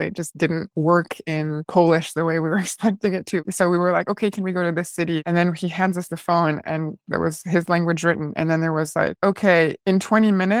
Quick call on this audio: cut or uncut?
uncut